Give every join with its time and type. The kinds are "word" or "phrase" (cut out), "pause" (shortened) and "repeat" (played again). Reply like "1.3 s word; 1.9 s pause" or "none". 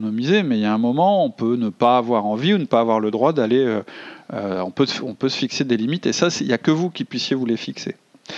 none

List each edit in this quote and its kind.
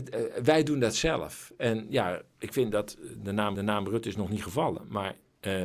3.5 s repeat

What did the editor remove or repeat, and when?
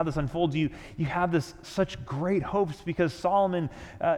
none

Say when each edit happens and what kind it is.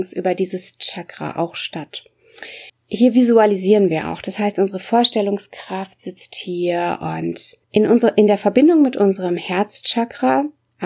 2.7 s pause; 7.6 s pause

